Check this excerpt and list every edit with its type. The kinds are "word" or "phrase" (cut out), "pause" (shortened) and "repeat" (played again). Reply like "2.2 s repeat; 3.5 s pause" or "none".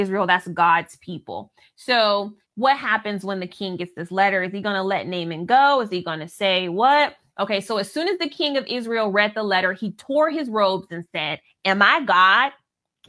2.4 s pause